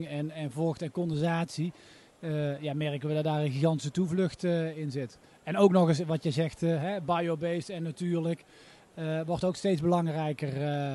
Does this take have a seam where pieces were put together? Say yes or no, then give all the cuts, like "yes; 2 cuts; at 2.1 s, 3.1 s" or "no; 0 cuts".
no; 0 cuts